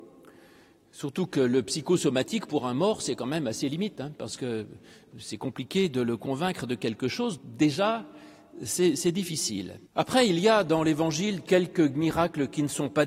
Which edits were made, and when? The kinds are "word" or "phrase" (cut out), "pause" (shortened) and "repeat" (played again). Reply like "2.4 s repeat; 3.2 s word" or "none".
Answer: 7.4 s word; 9.9 s pause